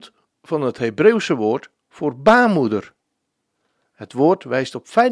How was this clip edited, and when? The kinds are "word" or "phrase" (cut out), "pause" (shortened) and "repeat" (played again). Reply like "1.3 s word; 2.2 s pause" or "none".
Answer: none